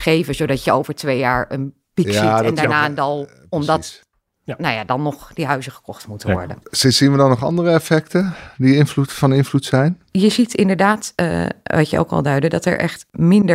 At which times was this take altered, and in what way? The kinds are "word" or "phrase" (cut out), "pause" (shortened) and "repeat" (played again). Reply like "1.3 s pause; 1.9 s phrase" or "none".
none